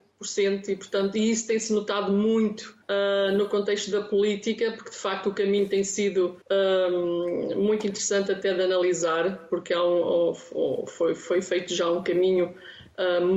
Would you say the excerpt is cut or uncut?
cut